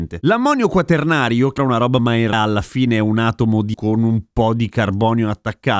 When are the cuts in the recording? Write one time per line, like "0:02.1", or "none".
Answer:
0:01.6
0:02.0
0:02.3
0:03.7